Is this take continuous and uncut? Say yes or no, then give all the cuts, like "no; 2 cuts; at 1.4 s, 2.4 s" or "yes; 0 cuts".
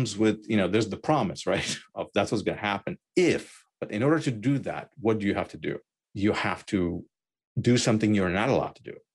no; 1 cut; at 6.0 s